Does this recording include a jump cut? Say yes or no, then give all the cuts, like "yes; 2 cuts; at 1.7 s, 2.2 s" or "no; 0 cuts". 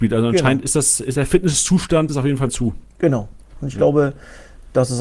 yes; 3 cuts; at 1.1 s, 2.1 s, 2.5 s